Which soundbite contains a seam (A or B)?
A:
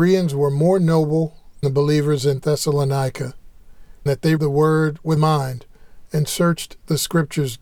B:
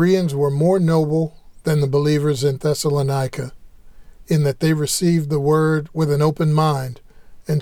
A